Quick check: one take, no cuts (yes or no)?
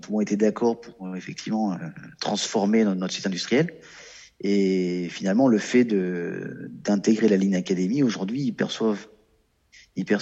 yes